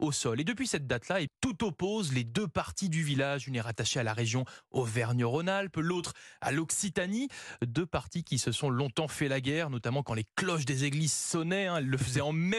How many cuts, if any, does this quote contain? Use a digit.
1